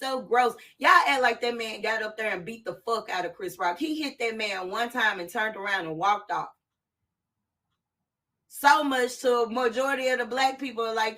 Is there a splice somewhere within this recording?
no; 0 cuts

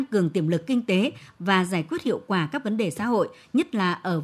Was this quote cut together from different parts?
no; 0 cuts

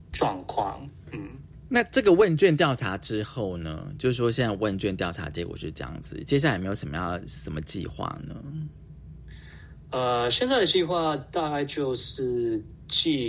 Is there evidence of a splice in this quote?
no; 0 cuts

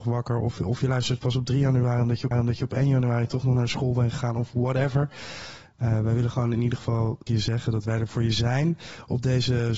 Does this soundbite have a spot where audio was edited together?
yes; 2 cuts; at 2.3 s, 7.3 s

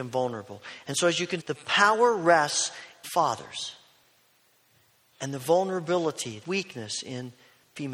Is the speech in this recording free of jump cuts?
no; 3 cuts; at 1.4 s, 3.0 s, 6.4 s

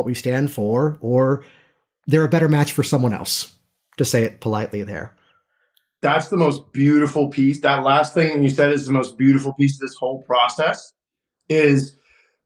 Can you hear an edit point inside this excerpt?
no; 0 cuts

